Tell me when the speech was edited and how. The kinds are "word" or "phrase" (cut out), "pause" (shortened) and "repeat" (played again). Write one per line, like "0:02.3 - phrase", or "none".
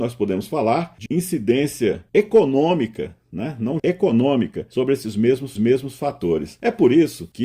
0:01.1 - phrase
0:03.8 - word
0:05.6 - repeat